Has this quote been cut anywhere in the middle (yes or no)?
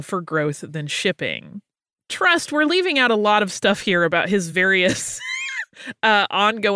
no